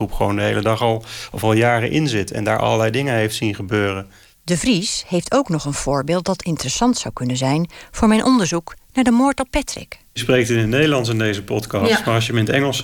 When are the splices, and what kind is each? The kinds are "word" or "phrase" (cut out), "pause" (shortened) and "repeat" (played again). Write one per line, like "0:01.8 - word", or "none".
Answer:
none